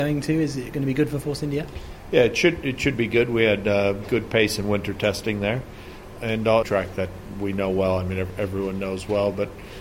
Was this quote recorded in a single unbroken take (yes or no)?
no